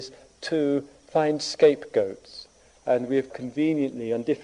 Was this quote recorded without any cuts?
no; 1 cut; at 3.3 s

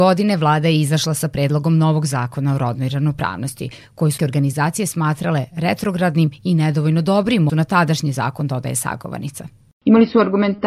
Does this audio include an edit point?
yes; 2 cuts; at 4.2 s, 7.5 s

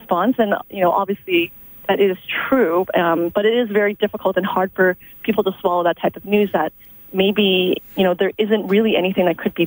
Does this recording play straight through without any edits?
yes; 0 cuts

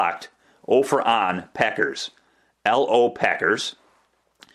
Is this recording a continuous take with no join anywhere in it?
yes; 0 cuts

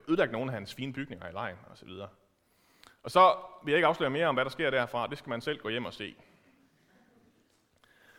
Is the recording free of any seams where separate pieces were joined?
yes; 0 cuts

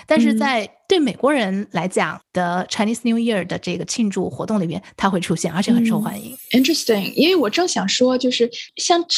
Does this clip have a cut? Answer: no; 0 cuts

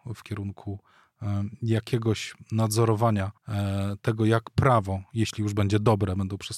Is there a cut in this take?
yes; 1 cut; at 3.4 s

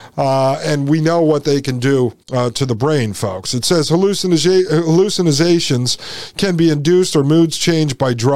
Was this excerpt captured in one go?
no; 1 cut; at 2.2 s

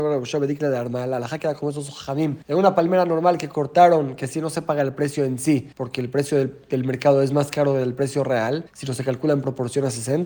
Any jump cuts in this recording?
yes; 3 cuts; at 2.4 s, 5.7 s, 8.7 s

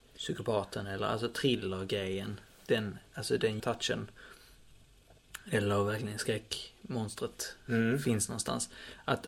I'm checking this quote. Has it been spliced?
yes; 1 cut; at 3.6 s

